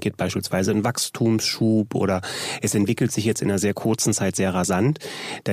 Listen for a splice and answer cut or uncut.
uncut